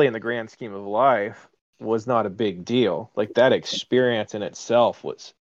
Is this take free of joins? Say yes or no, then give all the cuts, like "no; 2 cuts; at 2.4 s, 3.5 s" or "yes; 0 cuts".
yes; 0 cuts